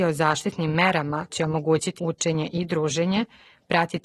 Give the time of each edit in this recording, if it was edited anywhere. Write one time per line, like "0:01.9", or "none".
0:01.3
0:02.0